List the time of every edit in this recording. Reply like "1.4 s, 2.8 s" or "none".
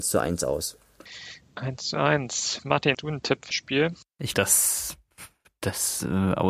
2.9 s, 3.5 s, 4.3 s